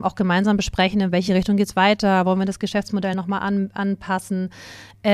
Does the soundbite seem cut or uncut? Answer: uncut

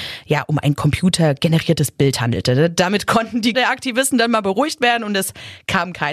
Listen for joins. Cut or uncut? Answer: cut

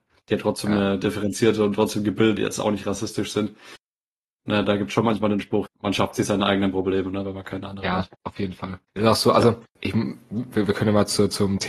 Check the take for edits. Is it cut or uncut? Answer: cut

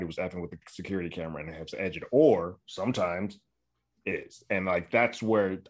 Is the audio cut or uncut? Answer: cut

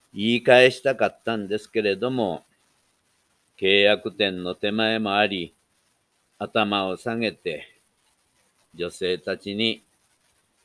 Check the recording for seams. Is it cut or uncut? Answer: uncut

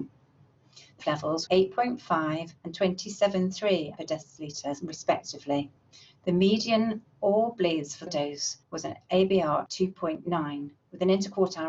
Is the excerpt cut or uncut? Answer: cut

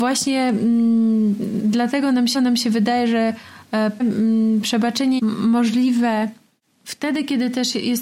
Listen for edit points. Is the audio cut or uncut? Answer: cut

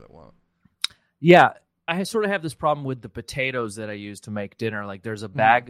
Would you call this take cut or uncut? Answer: cut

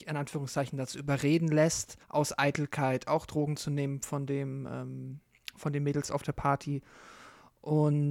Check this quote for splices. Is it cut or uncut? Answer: cut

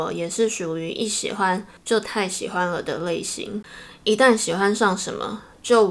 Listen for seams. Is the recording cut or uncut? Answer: cut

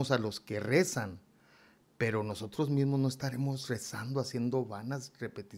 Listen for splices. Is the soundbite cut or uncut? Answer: uncut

